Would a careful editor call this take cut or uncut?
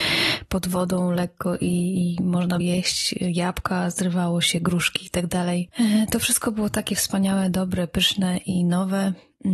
cut